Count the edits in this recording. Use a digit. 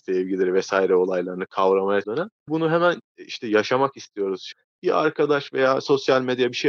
2